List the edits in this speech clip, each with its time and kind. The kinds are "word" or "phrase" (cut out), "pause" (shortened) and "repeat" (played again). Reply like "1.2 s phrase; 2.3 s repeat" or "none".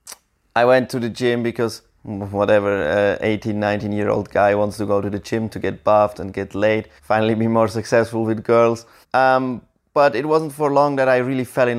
7.0 s pause; 9.0 s pause